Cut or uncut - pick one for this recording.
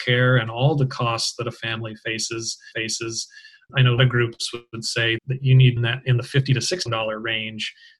cut